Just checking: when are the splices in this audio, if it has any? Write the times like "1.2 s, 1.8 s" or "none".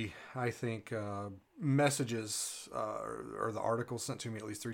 1.5 s